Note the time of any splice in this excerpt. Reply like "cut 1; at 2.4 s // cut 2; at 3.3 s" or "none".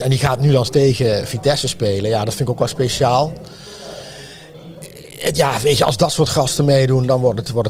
none